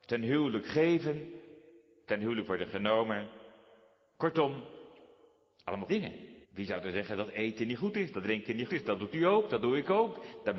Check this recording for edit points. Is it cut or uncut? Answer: cut